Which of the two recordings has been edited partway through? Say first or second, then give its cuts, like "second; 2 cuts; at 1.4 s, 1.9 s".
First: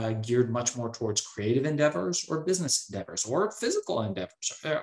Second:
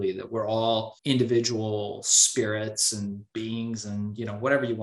second; 1 cut; at 1.0 s